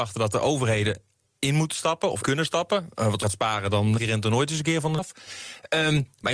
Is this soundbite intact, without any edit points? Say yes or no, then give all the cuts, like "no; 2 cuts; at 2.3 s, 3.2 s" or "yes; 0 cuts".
no; 4 cuts; at 2.2 s, 3.2 s, 4.0 s, 5.0 s